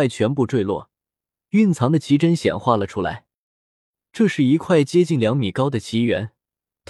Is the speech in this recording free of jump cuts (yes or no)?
yes